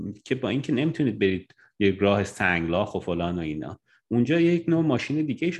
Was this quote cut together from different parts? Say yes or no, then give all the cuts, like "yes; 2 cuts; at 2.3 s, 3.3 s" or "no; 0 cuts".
no; 0 cuts